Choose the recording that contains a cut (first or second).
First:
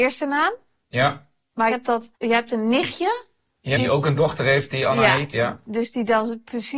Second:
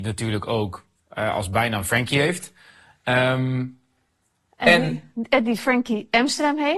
first